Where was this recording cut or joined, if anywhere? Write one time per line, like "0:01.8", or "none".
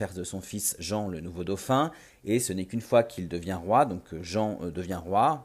none